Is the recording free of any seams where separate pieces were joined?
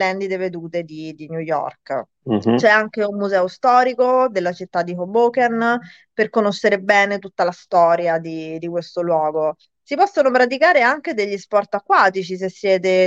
no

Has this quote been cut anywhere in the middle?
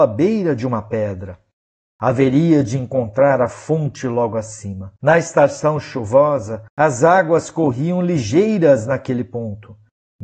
yes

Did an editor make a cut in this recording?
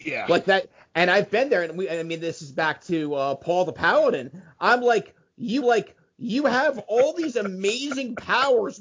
yes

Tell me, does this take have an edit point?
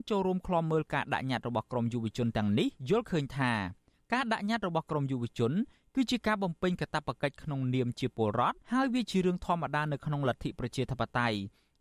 yes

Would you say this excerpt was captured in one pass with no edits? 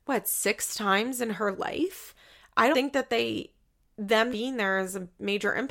no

